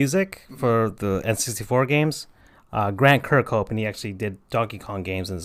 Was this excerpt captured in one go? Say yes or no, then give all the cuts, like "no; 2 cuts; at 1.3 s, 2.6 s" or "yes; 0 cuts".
yes; 0 cuts